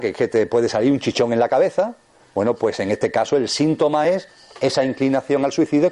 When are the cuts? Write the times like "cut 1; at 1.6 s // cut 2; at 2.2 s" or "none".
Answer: none